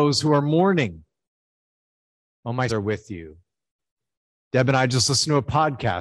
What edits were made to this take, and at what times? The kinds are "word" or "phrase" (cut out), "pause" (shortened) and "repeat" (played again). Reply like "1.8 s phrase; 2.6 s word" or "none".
2.7 s word